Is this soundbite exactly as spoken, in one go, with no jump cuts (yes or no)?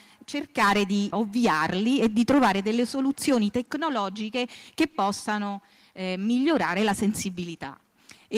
no